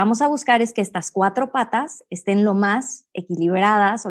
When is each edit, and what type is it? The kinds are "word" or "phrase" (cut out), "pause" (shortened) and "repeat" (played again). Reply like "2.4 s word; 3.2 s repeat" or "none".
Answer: none